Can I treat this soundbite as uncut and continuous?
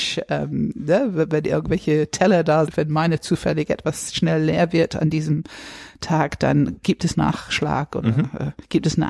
no; 2 cuts; at 2.7 s, 7.1 s

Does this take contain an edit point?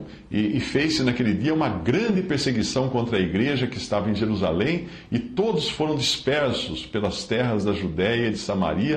no; 0 cuts

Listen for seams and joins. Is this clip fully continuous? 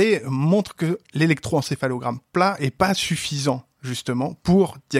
yes; 0 cuts

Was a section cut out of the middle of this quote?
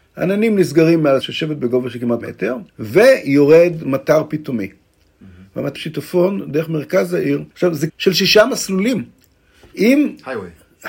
yes; 6 cuts; at 1.2 s, 2.2 s, 2.7 s, 5.8 s, 7.5 s, 7.9 s

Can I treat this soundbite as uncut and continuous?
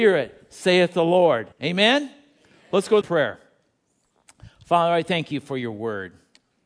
no; 2 cuts; at 1.5 s, 3.0 s

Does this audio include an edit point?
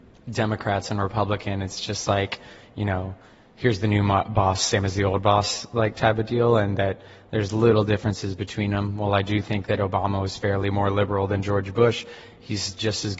no; 0 cuts

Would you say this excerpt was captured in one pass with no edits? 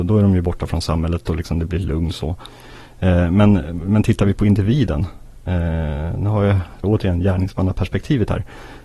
no; 1 cut; at 6.8 s

